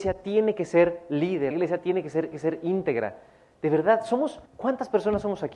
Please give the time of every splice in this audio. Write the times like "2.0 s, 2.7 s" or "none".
1.5 s, 2.3 s, 4.5 s